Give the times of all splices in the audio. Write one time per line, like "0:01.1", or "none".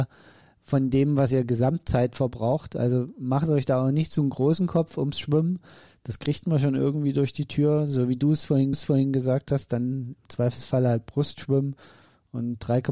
0:08.7